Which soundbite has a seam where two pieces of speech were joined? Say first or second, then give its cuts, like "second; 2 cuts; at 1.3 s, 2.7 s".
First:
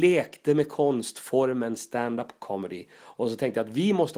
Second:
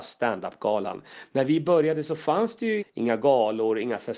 second; 1 cut; at 2.8 s